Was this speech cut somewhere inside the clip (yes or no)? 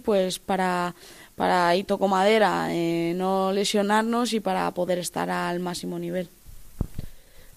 no